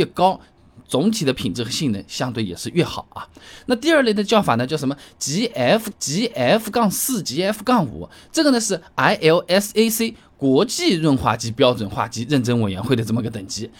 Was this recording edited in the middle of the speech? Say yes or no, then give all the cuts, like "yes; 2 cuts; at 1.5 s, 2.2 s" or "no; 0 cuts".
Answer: yes; 1 cut; at 5.9 s